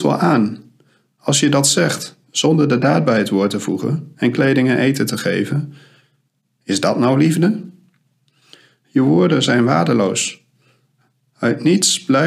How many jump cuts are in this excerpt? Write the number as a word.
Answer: zero